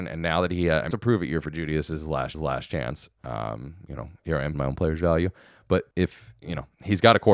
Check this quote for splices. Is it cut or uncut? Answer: cut